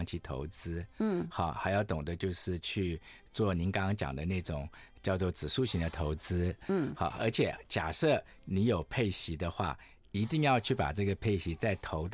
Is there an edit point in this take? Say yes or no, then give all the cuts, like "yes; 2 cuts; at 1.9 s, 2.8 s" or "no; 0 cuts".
no; 0 cuts